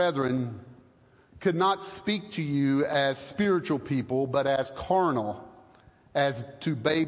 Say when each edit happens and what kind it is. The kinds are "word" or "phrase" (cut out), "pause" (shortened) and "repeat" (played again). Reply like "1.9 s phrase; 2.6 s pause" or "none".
none